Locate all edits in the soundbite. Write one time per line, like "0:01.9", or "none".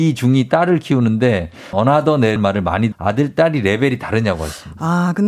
0:01.7
0:02.4
0:02.9